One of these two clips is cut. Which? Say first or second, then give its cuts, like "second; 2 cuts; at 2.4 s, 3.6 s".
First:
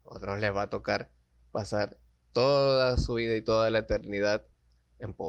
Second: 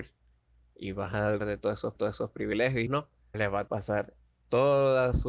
second; 5 cuts; at 1.4 s, 1.9 s, 2.9 s, 3.3 s, 3.7 s